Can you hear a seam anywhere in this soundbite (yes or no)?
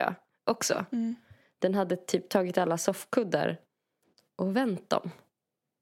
no